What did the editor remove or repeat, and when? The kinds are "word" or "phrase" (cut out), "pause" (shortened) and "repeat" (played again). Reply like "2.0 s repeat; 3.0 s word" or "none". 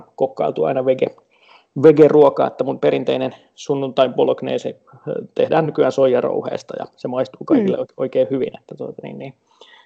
none